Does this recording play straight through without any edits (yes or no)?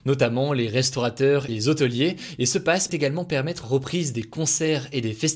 no